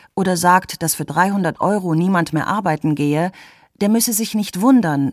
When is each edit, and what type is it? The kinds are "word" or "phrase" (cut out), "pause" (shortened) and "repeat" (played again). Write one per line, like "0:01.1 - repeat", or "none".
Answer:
none